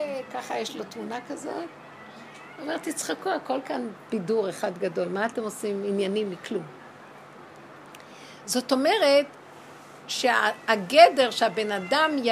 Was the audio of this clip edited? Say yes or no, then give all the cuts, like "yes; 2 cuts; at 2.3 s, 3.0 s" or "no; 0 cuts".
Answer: no; 0 cuts